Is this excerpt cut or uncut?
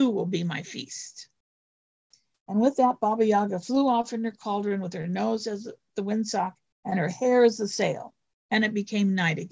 uncut